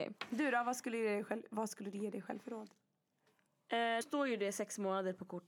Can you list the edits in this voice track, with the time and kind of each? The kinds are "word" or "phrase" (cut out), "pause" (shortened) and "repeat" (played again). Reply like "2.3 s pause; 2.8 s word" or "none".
4.0 s word

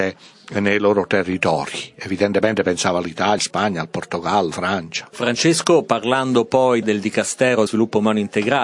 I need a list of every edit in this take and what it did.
3.4 s word; 4.5 s word; 6.8 s word; 7.7 s word

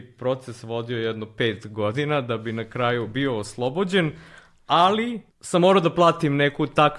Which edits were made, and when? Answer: 5.3 s pause

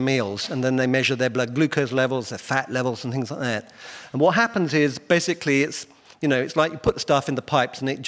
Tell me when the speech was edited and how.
none

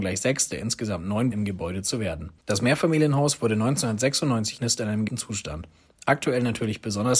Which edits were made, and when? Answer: 1.3 s word; 2.4 s pause; 4.6 s word; 5.1 s word

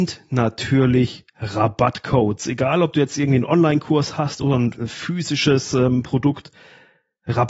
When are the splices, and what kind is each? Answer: none

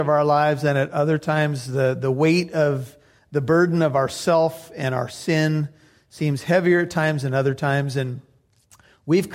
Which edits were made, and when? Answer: none

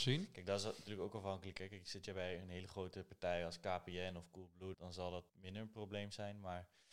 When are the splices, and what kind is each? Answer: 4.7 s word; 5.3 s pause

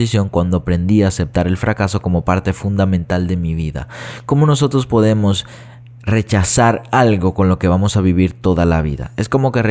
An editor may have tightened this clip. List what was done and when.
5.8 s pause

